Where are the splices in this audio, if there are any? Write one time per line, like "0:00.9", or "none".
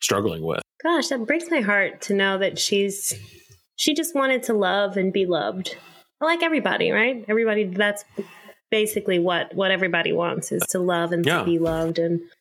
none